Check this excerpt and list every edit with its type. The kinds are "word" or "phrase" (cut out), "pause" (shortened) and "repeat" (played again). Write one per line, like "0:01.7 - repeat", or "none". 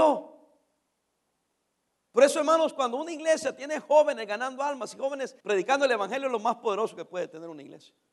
0:05.4 - pause